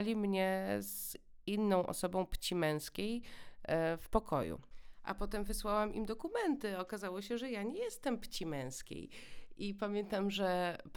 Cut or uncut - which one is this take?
uncut